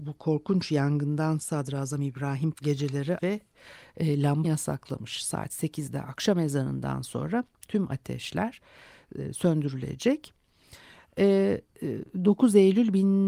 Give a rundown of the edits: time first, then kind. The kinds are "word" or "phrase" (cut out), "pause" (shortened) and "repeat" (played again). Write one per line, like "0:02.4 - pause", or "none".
0:01.4 - word
0:02.5 - word
0:03.2 - word
0:04.4 - word